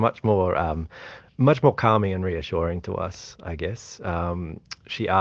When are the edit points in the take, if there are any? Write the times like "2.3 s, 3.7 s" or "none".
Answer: 1.3 s